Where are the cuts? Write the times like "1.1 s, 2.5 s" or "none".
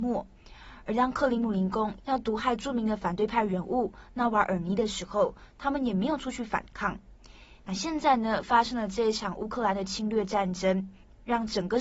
none